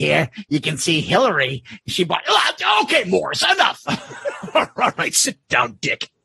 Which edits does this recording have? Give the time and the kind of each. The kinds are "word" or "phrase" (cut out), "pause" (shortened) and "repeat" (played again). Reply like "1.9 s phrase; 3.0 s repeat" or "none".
none

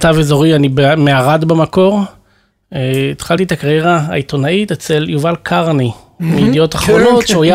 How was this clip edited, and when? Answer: none

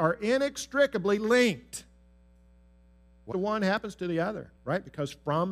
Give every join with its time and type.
3.3 s word; 4.6 s pause

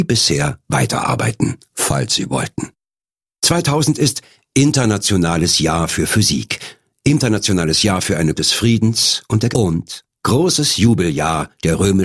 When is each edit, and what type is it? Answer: 8.4 s word; 9.5 s word

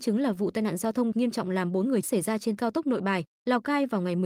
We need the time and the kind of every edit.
1.1 s phrase; 2.0 s word; 2.6 s word

